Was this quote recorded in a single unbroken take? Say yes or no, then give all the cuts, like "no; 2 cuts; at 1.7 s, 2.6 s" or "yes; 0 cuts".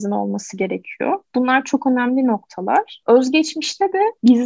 yes; 0 cuts